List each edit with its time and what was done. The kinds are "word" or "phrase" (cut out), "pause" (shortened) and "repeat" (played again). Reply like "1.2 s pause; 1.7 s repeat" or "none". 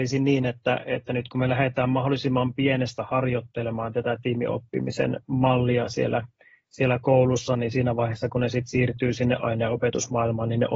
none